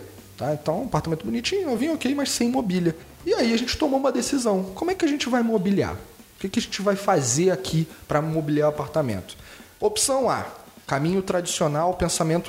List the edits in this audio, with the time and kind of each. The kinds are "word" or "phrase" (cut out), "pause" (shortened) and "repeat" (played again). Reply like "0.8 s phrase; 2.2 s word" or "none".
none